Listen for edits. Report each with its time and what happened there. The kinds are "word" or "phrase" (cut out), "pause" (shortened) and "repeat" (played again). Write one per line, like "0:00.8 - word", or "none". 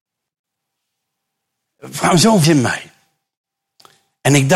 0:02.4 - word